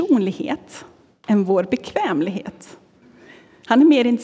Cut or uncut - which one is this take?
uncut